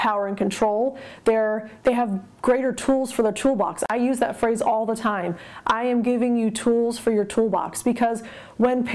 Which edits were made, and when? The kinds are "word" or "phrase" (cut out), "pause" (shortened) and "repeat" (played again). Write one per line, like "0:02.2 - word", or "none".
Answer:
0:01.8 - pause